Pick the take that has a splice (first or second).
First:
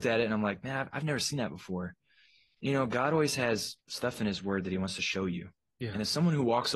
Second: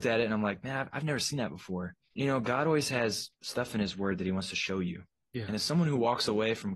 second